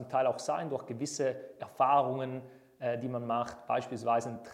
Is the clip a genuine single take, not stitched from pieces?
yes; 0 cuts

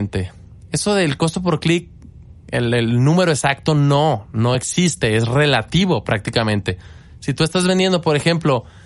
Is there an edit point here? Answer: no; 0 cuts

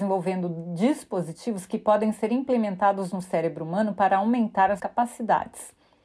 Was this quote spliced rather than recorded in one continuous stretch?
yes; 1 cut; at 4.8 s

